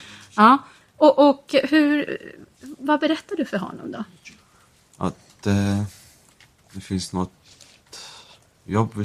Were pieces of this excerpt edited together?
no; 0 cuts

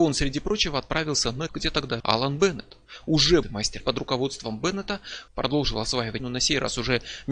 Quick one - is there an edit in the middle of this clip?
yes; 6 cuts; at 1.5 s, 2.0 s, 3.4 s, 3.8 s, 5.3 s, 6.2 s

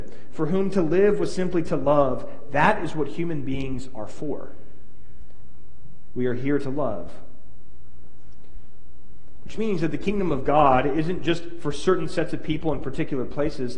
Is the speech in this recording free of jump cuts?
yes; 0 cuts

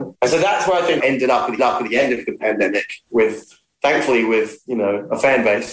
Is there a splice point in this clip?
yes; 2 cuts; at 1.0 s, 1.6 s

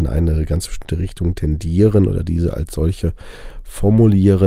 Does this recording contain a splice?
no; 0 cuts

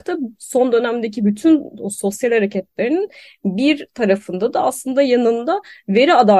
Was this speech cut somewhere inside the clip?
no; 0 cuts

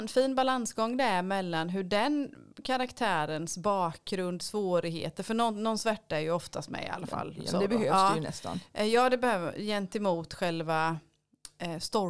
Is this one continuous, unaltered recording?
yes; 0 cuts

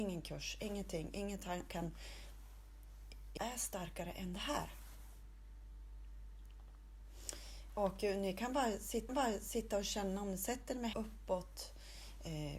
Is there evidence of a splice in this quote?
yes; 4 cuts; at 1.7 s, 3.4 s, 9.1 s, 10.9 s

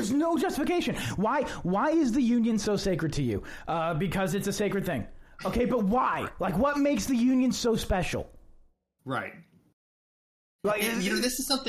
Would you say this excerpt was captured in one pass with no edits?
yes; 0 cuts

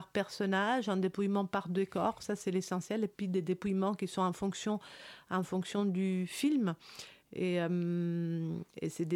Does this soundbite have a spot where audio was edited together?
no; 0 cuts

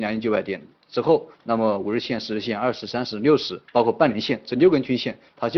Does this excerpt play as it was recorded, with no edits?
no; 2 cuts; at 1.3 s, 3.7 s

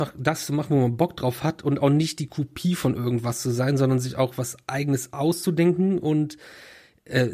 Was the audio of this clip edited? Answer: no; 0 cuts

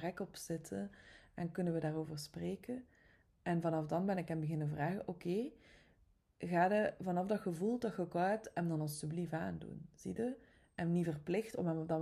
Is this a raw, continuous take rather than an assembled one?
yes; 0 cuts

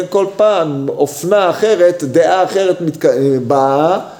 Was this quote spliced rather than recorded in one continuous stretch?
no; 0 cuts

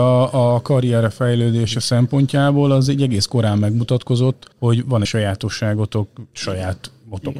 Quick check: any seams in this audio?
yes; 2 cuts; at 4.5 s, 5.0 s

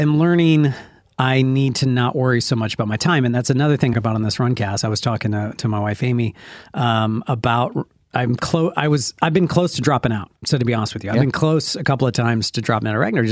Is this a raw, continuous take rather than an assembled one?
no; 2 cuts; at 3.9 s, 10.4 s

